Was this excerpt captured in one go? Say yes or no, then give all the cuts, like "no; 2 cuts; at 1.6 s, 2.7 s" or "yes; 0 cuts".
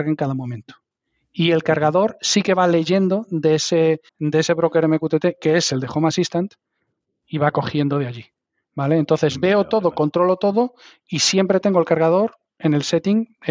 no; 1 cut; at 4.1 s